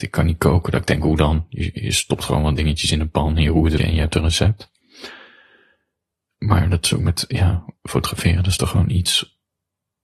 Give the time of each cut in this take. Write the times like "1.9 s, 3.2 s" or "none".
3.8 s